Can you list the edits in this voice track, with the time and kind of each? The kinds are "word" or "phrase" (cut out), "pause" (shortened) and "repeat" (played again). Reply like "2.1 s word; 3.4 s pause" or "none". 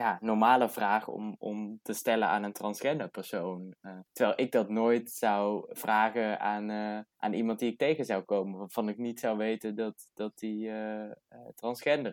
4.1 s pause; 7.1 s pause